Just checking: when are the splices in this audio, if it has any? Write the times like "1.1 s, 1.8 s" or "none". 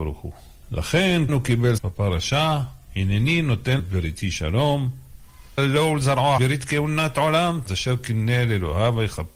1.3 s, 1.8 s, 3.8 s, 5.6 s, 6.4 s, 7.7 s